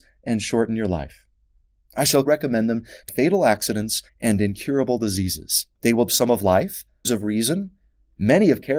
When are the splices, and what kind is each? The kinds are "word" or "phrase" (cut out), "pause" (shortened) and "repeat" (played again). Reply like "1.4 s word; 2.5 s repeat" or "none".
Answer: 2.3 s word; 3.1 s word; 4.1 s pause; 5.7 s pause; 6.1 s word; 7.0 s word